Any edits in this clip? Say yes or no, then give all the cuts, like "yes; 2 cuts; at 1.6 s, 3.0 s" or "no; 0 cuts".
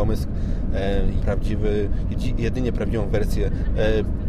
yes; 1 cut; at 1.2 s